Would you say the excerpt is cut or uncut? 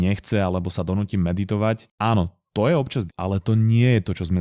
cut